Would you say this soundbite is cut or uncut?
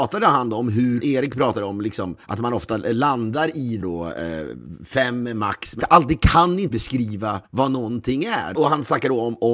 cut